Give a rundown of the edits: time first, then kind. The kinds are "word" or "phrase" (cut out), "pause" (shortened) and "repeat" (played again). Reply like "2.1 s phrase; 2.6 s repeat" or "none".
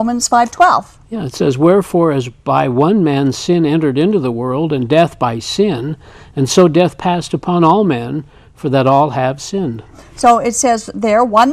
none